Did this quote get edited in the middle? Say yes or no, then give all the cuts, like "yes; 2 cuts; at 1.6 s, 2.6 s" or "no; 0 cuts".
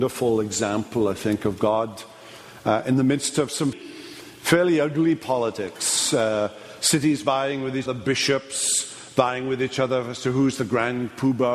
yes; 2 cuts; at 3.7 s, 7.9 s